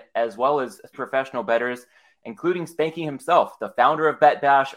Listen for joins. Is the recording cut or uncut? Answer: cut